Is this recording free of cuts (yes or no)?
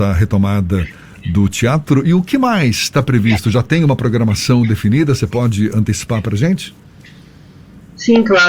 yes